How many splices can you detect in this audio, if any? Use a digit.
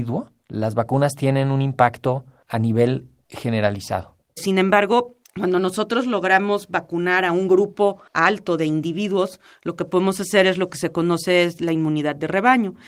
2